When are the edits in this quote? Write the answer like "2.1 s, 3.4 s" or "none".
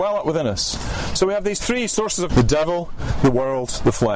2.3 s